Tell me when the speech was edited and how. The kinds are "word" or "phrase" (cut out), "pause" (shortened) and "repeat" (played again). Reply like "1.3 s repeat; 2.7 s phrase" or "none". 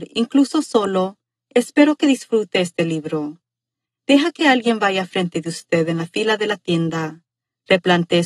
none